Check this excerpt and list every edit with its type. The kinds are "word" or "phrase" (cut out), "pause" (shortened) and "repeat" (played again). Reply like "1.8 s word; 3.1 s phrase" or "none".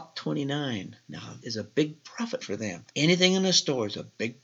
1.4 s word; 2.4 s word; 2.9 s pause